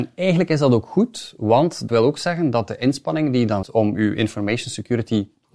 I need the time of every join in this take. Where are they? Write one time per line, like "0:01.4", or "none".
0:01.9
0:03.6